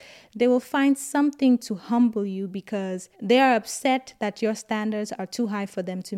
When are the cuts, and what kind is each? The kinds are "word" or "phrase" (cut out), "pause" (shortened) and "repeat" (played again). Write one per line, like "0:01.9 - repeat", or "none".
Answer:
0:03.1 - pause